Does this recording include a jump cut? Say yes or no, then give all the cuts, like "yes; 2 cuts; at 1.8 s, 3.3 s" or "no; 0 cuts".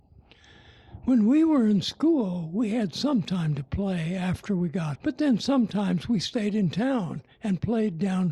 yes; 1 cut; at 4.9 s